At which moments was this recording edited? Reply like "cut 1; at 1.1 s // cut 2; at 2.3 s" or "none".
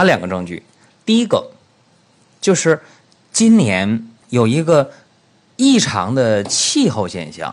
cut 1; at 4.2 s